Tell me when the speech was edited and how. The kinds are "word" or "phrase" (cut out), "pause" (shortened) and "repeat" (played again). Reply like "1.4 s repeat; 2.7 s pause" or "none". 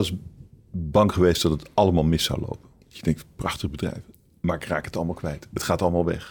2.8 s pause; 4.1 s pause